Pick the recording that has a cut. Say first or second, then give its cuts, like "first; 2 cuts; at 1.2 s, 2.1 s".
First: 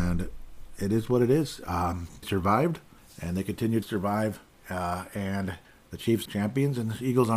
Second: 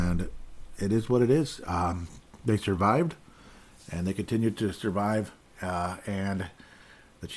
first; 5 cuts; at 2.2 s, 3.0 s, 3.8 s, 5.6 s, 6.3 s